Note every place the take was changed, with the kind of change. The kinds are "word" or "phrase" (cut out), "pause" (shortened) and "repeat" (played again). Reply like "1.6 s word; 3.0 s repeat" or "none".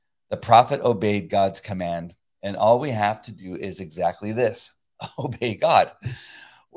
none